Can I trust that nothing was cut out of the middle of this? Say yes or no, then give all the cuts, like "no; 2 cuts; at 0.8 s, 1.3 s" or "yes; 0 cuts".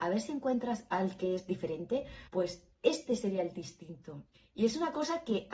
no; 2 cuts; at 2.3 s, 4.3 s